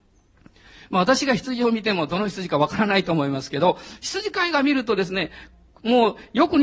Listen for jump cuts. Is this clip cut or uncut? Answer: uncut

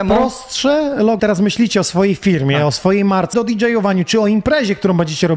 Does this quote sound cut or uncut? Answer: cut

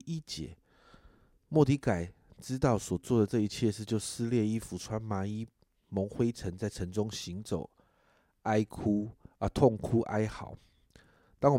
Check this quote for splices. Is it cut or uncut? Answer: uncut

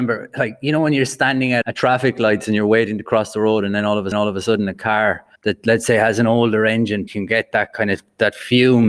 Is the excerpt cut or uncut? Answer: cut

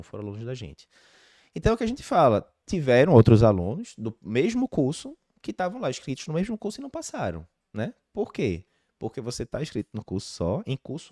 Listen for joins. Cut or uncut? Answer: uncut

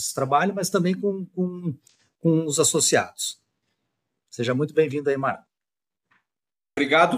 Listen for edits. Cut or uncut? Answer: uncut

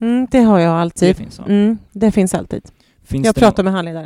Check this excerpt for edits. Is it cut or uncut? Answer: uncut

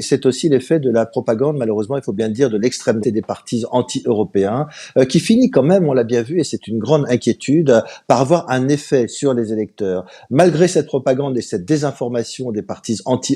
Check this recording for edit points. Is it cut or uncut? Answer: cut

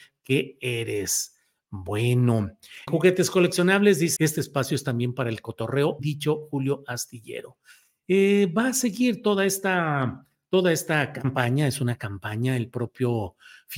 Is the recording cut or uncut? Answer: cut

